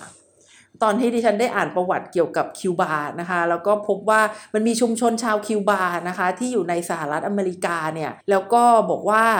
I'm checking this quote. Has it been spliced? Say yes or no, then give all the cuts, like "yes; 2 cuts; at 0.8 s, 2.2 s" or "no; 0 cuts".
yes; 1 cut; at 8.2 s